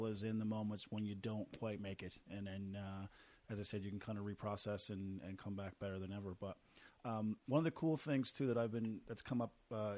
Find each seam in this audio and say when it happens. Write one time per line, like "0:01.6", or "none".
none